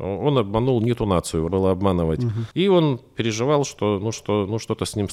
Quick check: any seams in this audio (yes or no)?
yes